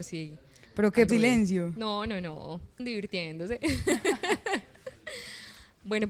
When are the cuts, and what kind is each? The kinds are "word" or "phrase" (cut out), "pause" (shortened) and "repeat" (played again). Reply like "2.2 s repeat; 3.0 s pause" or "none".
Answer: 1.1 s word; 2.8 s phrase